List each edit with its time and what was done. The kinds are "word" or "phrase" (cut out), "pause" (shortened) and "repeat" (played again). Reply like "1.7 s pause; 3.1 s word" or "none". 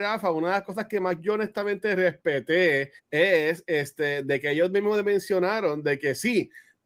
3.0 s pause